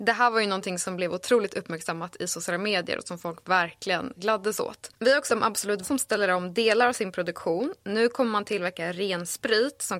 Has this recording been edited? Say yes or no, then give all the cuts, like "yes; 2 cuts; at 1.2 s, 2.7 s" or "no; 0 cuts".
yes; 3 cuts; at 4.2 s, 5.3 s, 5.8 s